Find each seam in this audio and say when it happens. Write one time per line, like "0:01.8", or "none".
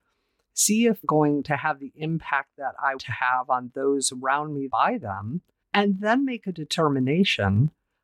0:01.0
0:03.0
0:04.7
0:05.6